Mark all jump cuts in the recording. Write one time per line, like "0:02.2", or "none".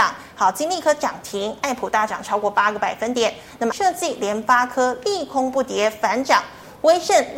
0:03.7